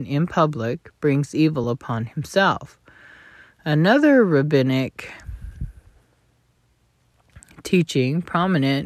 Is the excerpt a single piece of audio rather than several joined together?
yes; 0 cuts

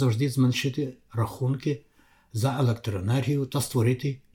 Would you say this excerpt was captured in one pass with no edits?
yes; 0 cuts

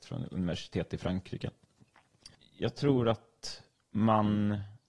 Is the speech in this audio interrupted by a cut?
no; 0 cuts

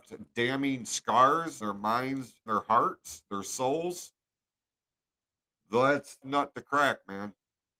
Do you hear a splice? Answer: yes; 3 cuts; at 1.6 s, 2.5 s, 6.2 s

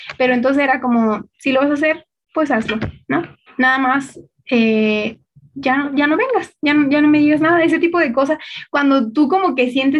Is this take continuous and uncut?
no; 1 cut; at 3.5 s

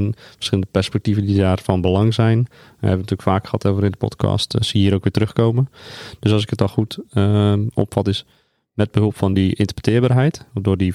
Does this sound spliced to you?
no; 0 cuts

